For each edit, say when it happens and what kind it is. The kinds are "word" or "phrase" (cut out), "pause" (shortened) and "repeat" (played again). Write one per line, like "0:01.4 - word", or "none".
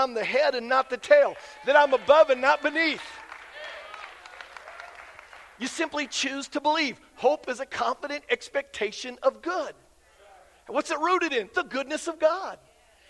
none